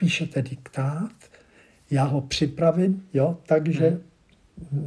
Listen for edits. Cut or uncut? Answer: uncut